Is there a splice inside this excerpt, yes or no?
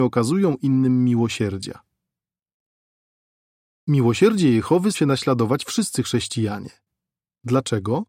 yes